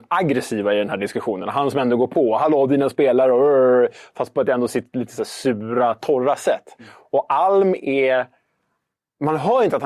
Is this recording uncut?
yes; 0 cuts

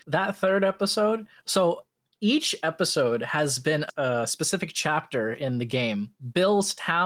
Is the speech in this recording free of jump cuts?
yes; 0 cuts

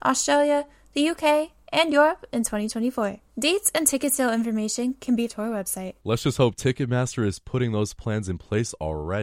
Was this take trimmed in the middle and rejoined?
yes; 3 cuts; at 3.3 s, 5.3 s, 6.0 s

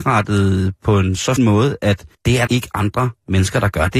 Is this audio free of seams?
no; 3 cuts; at 1.4 s, 2.1 s, 2.5 s

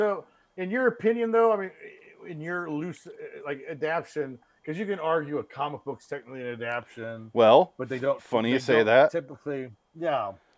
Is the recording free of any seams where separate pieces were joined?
yes; 0 cuts

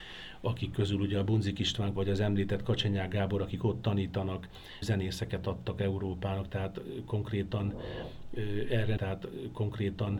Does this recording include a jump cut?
yes; 3 cuts; at 2.0 s, 4.8 s, 9.0 s

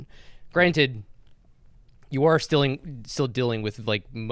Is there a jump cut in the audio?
no; 0 cuts

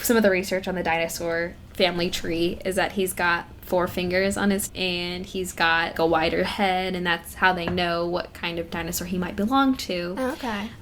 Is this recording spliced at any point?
yes; 3 cuts; at 3.6 s, 4.7 s, 5.9 s

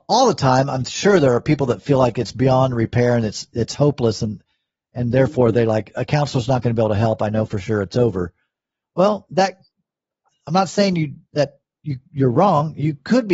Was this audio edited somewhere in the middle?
no; 0 cuts

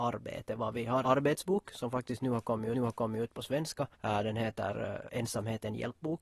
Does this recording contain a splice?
yes; 3 cuts; at 1.0 s, 2.7 s, 3.9 s

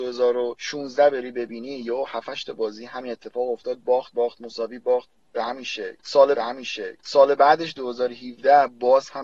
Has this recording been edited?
yes; 2 cuts; at 4.1 s, 6.4 s

